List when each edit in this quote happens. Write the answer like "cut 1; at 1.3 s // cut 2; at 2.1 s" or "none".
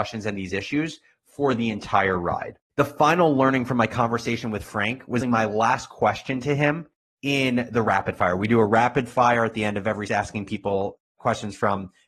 cut 1; at 2.7 s // cut 2; at 5.2 s // cut 3; at 10.1 s